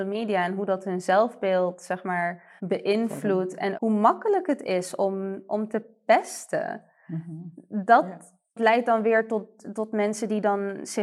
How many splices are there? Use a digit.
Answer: 2